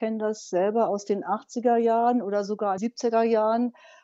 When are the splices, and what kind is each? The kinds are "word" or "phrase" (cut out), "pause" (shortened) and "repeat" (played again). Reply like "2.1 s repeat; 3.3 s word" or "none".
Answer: 2.8 s word

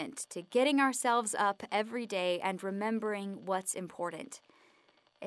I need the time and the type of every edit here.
none

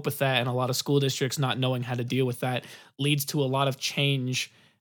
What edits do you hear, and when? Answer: none

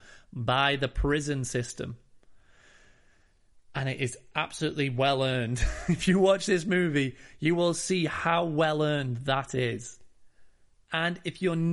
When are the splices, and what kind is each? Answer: none

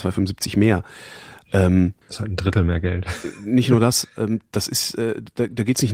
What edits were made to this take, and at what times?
2.0 s pause

